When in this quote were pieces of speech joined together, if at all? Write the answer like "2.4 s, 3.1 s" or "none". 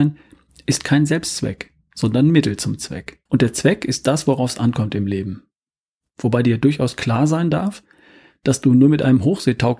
3.3 s